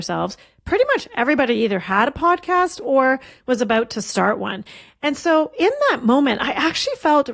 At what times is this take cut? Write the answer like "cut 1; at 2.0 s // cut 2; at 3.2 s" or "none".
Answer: none